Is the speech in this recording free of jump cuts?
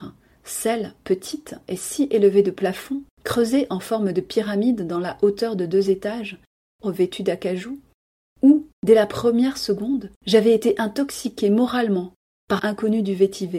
no; 5 cuts; at 3.1 s, 6.8 s, 8.7 s, 10.2 s, 12.6 s

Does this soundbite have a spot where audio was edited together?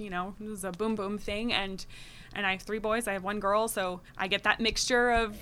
yes; 2 cuts; at 1.0 s, 4.1 s

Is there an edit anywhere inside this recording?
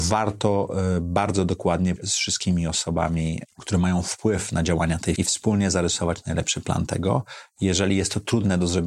yes; 2 cuts; at 2.0 s, 5.2 s

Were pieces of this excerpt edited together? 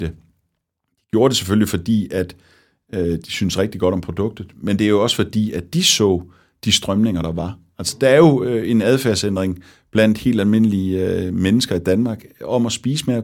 no; 0 cuts

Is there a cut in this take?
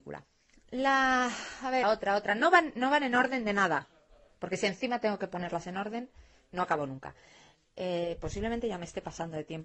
yes; 1 cut; at 1.8 s

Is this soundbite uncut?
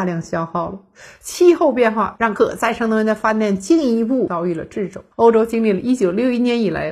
no; 1 cut; at 5.1 s

